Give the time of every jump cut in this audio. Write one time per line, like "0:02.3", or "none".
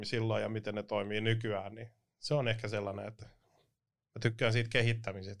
none